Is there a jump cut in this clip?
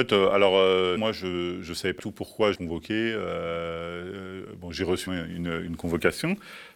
yes; 4 cuts; at 1.0 s, 2.0 s, 2.5 s, 5.1 s

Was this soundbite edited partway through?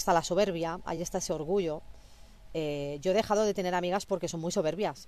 no; 0 cuts

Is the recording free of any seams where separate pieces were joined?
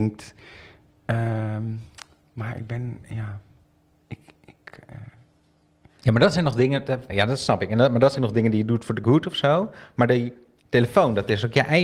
no; 3 cuts; at 7.1 s, 8.2 s, 9.0 s

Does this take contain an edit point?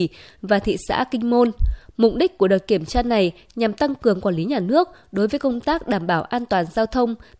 no; 0 cuts

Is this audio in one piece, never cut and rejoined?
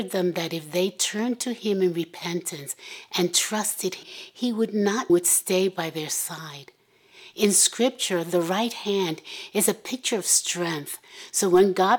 no; 2 cuts; at 4.0 s, 5.1 s

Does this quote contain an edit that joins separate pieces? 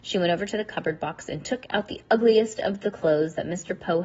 no; 0 cuts

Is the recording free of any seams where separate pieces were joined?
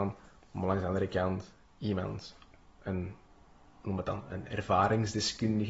yes; 0 cuts

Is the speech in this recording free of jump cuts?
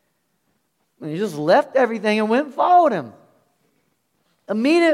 yes; 0 cuts

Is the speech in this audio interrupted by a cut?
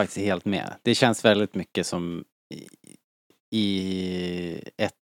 yes; 1 cut; at 2.3 s

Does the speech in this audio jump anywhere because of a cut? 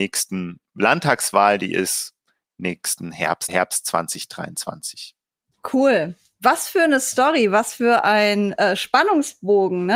yes; 1 cut; at 3.5 s

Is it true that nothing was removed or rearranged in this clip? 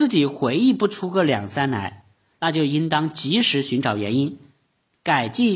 yes; 0 cuts

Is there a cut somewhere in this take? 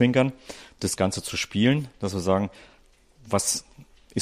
no; 0 cuts

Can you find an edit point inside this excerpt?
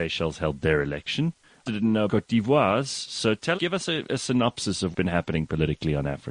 yes; 4 cuts; at 1.7 s, 2.1 s, 3.6 s, 4.9 s

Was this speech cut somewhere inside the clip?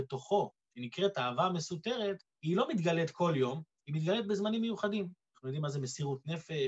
yes; 1 cut; at 2.3 s

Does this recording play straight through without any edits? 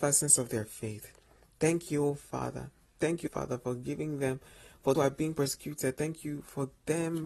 no; 2 cuts; at 3.3 s, 4.9 s

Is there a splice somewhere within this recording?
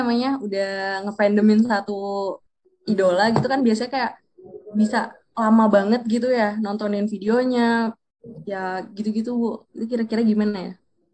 no; 0 cuts

